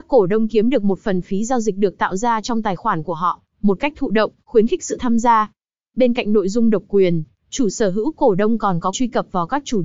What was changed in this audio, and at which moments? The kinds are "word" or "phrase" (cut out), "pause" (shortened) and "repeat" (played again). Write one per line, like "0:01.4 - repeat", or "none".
0:08.9 - word

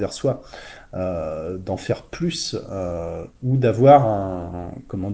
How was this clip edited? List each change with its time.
none

